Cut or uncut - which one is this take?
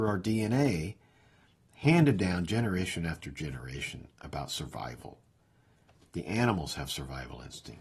uncut